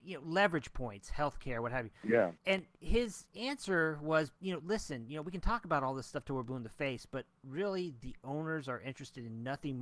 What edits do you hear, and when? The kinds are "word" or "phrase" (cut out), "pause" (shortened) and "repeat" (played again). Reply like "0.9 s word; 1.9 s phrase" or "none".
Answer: 2.4 s pause; 4.4 s pause